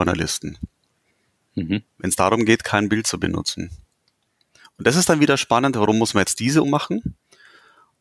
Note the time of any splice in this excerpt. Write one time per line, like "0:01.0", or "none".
0:06.6